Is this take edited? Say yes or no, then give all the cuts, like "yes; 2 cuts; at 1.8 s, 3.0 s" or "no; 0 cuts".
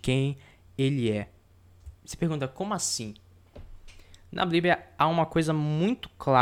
yes; 1 cut; at 1.9 s